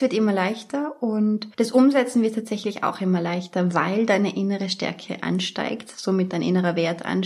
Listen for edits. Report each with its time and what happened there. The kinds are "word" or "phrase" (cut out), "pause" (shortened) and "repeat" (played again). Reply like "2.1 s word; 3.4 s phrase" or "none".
1.5 s pause